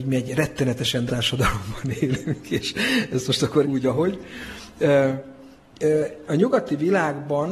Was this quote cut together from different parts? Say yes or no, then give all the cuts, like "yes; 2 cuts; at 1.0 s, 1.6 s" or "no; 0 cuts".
yes; 2 cuts; at 1.1 s, 3.6 s